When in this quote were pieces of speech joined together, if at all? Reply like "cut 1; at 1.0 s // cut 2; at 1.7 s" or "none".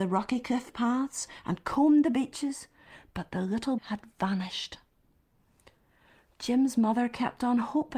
cut 1; at 3.8 s